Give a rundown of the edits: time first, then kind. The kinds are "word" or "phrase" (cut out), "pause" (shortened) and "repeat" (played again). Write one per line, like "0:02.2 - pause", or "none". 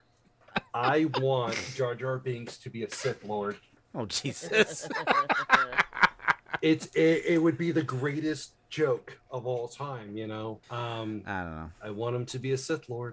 0:03.8 - pause
0:10.6 - pause
0:11.7 - pause